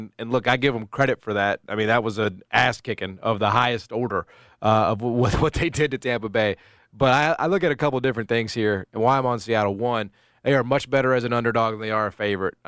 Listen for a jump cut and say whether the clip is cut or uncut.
uncut